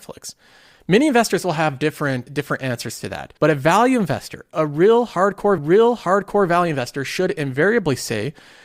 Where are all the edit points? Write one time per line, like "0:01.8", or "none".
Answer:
0:02.3
0:03.4
0:05.6